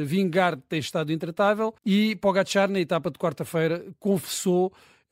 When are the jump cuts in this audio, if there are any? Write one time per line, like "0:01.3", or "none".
0:01.8